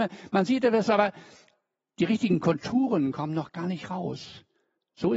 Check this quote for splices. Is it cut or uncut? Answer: uncut